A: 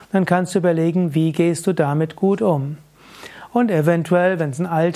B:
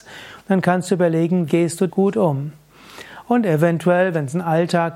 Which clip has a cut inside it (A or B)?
B